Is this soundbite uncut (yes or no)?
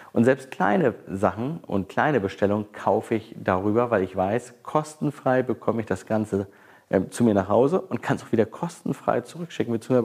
yes